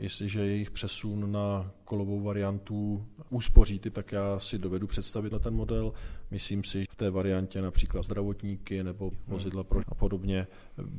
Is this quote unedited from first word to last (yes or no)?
no